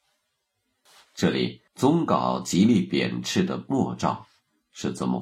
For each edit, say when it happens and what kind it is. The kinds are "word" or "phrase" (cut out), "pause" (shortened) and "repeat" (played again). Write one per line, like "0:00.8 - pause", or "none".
0:01.7 - pause

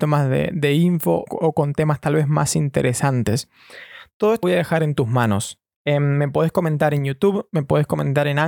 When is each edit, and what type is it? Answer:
0:01.3 - word
0:04.4 - word

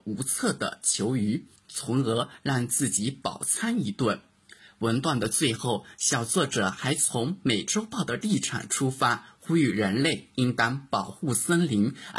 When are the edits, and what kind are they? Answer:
0:01.6 - pause

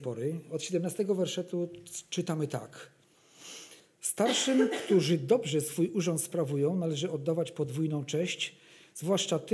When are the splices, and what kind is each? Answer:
none

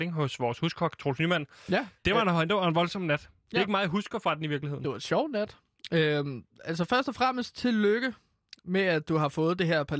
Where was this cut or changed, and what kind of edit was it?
0:02.0 - pause

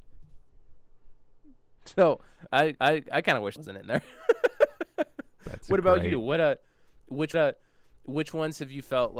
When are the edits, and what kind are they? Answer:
0:01.8 - pause
0:02.8 - repeat
0:03.6 - phrase
0:07.3 - repeat

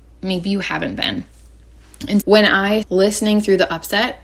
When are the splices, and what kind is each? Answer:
0:02.2 - word
0:02.8 - word

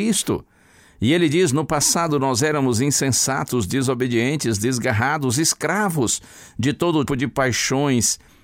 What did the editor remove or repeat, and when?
0:07.1 - word

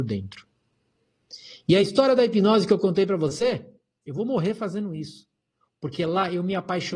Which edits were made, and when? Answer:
none

